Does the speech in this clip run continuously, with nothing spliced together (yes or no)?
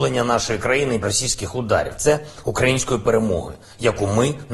no